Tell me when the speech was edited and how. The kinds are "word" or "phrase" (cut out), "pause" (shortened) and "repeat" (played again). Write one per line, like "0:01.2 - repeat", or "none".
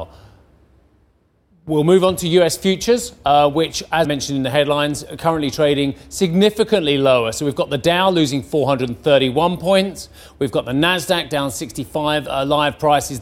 0:04.0 - word